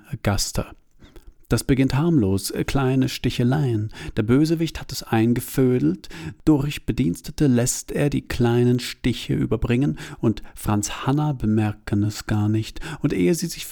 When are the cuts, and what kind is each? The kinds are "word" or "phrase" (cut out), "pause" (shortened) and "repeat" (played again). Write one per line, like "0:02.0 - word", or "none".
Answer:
none